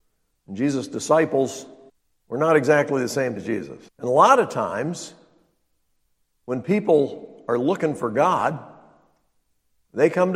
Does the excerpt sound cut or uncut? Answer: cut